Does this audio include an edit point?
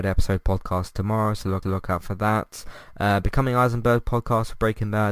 yes; 1 cut; at 1.6 s

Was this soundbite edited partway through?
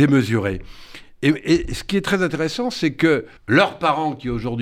yes; 1 cut; at 3.4 s

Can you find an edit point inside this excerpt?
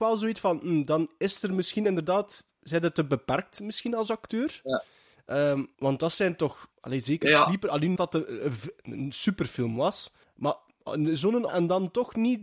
yes; 5 cuts; at 5.7 s, 6.7 s, 8.0 s, 10.2 s, 11.5 s

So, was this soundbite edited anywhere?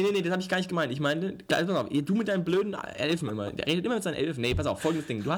no; 0 cuts

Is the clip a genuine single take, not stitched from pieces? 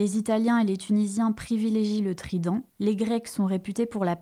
no; 1 cut; at 2.7 s

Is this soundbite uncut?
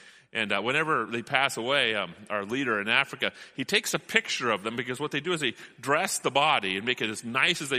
yes; 0 cuts

